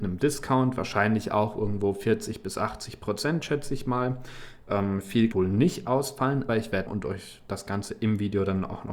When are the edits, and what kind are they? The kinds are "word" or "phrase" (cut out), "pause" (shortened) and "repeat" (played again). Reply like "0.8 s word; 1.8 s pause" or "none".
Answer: 5.3 s phrase; 6.5 s word; 6.9 s word